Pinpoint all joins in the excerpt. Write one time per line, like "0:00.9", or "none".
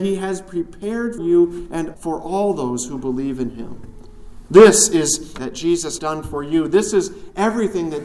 0:01.2
0:01.9
0:05.4
0:06.0

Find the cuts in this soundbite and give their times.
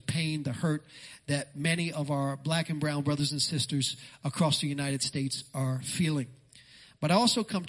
none

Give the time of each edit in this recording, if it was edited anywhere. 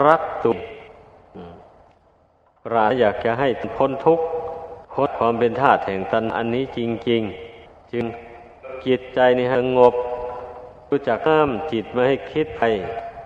0:04.8

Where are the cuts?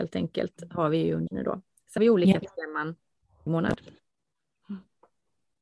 0:01.3
0:02.0
0:03.5

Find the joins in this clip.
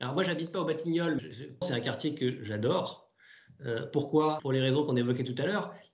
0:01.2
0:01.6
0:04.4

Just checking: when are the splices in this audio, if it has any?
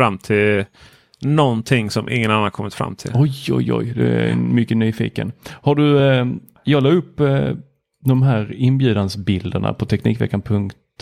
none

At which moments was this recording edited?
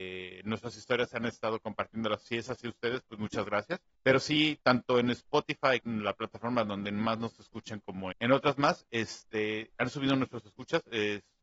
0:03.9
0:05.8
0:08.1

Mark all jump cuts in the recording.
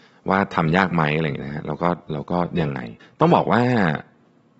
0:03.0

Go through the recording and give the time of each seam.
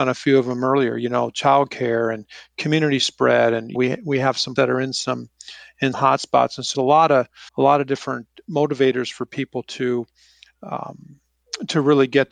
0:03.7
0:04.6
0:05.9
0:06.7
0:07.5

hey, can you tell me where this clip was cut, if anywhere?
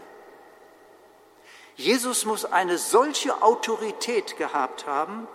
none

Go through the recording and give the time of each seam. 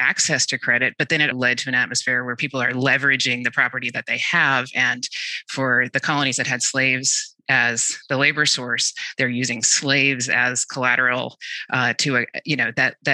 0:01.3

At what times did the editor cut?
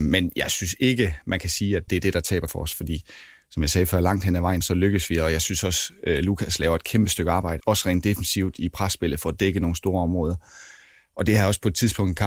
0:01.9
0:02.5
0:04.6
0:07.6

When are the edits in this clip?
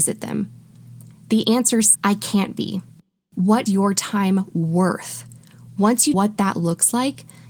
0:01.9
0:03.7
0:06.1

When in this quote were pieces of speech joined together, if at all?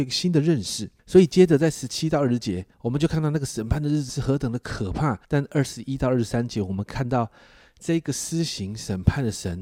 0:01.0
0:02.7
0:04.1
0:05.2

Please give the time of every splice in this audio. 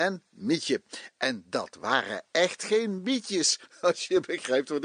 none

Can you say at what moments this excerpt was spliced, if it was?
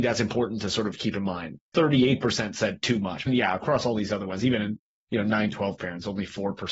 0:03.3

